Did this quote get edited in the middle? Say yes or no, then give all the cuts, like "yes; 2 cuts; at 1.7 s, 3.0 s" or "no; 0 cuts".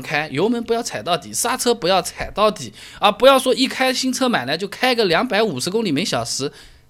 no; 0 cuts